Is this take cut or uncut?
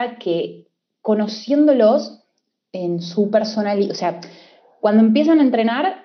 uncut